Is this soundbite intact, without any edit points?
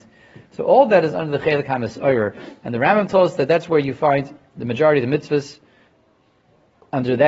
yes; 0 cuts

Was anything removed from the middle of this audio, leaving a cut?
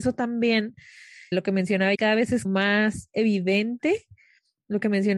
yes; 3 cuts; at 1.3 s, 1.9 s, 2.4 s

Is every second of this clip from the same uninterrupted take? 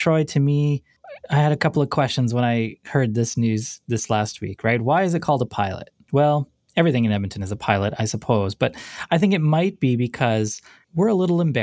yes; 0 cuts

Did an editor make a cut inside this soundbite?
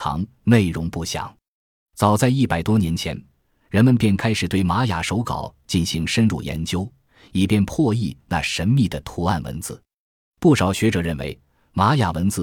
no; 0 cuts

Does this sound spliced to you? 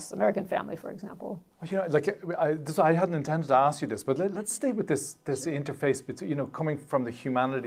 yes; 1 cut; at 1.5 s

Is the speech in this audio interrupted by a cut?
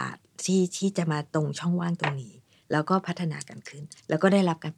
no; 0 cuts

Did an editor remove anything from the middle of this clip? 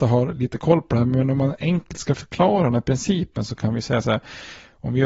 no; 0 cuts

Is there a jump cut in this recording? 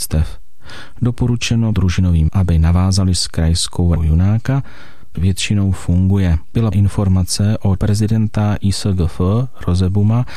yes; 7 cuts; at 1.7 s, 2.3 s, 3.2 s, 4.0 s, 5.2 s, 6.7 s, 7.8 s

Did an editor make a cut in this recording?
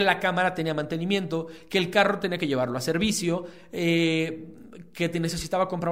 no; 0 cuts

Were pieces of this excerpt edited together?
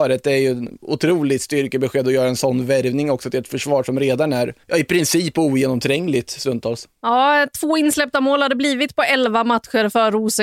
yes; 1 cut; at 4.6 s

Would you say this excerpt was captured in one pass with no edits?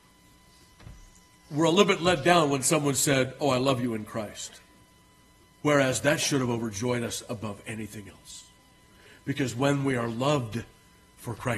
yes; 0 cuts

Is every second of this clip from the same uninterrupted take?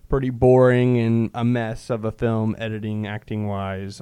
yes; 0 cuts

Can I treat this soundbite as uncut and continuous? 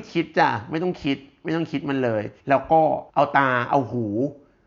no; 2 cuts; at 2.4 s, 3.1 s

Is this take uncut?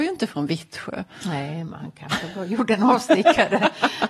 yes; 0 cuts

